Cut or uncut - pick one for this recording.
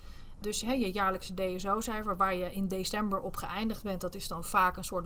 uncut